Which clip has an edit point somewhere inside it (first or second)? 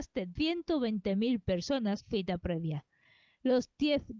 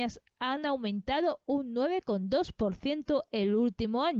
first